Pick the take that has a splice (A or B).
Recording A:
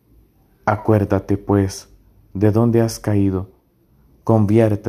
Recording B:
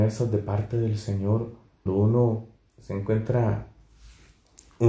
B